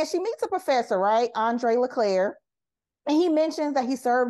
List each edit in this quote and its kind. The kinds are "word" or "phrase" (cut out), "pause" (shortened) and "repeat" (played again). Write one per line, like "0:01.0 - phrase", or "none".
none